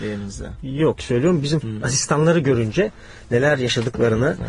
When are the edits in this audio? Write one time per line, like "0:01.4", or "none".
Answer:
0:01.0
0:01.6

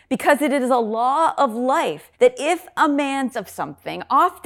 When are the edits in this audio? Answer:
0:02.1
0:03.3

